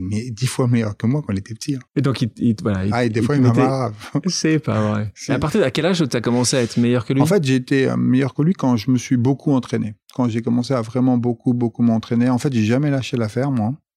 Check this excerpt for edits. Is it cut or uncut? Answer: cut